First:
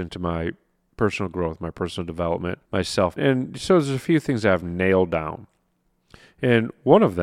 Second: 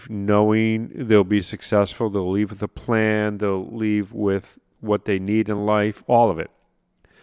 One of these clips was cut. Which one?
first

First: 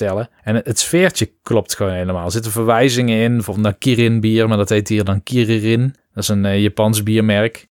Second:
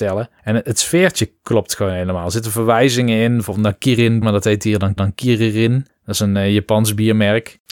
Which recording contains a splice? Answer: second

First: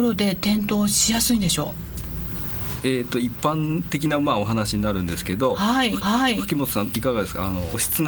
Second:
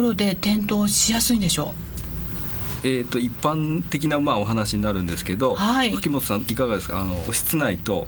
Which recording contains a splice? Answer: first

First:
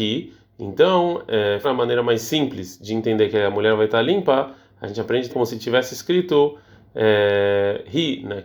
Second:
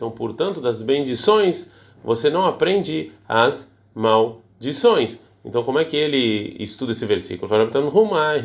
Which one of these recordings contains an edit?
first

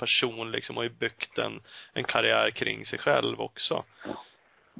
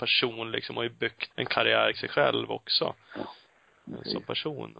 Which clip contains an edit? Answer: second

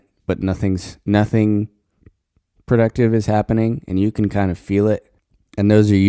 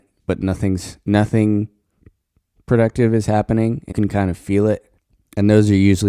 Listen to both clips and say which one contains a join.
second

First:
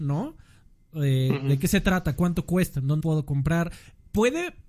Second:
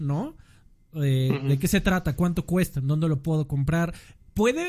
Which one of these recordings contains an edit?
first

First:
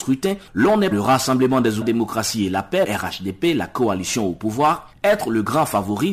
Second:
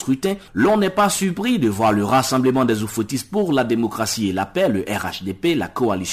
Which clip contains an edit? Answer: first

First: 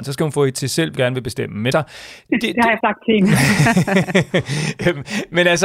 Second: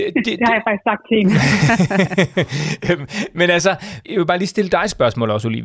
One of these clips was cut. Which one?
first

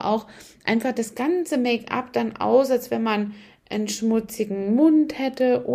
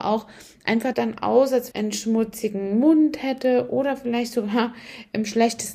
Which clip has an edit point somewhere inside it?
second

